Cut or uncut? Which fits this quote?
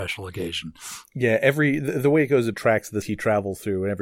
cut